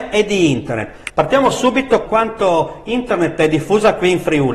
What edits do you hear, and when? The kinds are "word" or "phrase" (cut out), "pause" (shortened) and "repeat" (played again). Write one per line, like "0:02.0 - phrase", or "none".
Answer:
0:02.1 - word